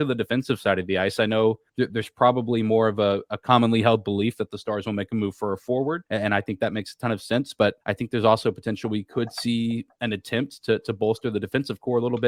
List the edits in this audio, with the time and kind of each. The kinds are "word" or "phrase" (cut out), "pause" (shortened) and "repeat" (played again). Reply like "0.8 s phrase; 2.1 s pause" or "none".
1.7 s pause; 6.1 s pause; 7.8 s pause